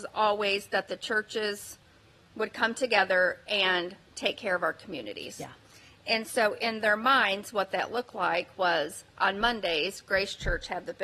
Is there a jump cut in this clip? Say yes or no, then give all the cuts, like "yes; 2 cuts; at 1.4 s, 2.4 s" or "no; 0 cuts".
no; 0 cuts